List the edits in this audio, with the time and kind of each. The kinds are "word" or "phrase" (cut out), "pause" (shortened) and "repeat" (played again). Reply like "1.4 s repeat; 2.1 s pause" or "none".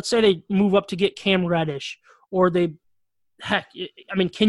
none